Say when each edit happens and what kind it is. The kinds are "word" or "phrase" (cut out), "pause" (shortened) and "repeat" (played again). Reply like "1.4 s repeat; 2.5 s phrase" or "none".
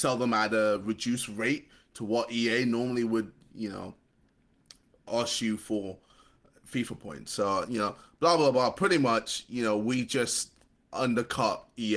none